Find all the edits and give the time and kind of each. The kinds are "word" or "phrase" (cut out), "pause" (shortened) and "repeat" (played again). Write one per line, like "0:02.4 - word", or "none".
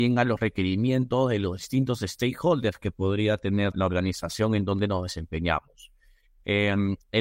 0:03.7 - word